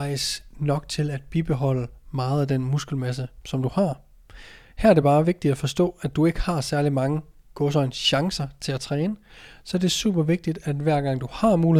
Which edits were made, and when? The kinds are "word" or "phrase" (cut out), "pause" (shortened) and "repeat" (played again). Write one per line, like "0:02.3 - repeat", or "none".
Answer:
none